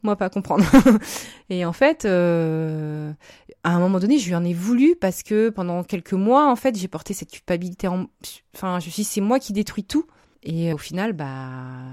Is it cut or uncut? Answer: cut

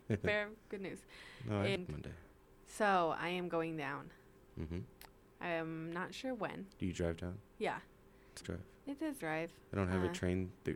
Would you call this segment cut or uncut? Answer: cut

